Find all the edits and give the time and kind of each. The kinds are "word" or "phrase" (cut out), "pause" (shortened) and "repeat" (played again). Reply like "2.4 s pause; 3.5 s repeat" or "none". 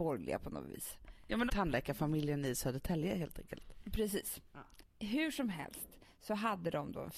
1.5 s phrase